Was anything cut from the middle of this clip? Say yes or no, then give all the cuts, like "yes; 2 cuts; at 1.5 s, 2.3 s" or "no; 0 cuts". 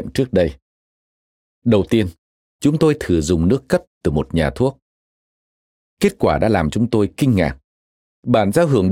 no; 0 cuts